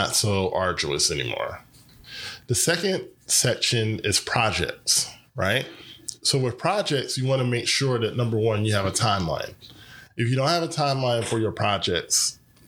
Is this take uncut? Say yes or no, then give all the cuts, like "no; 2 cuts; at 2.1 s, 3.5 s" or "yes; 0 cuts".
yes; 0 cuts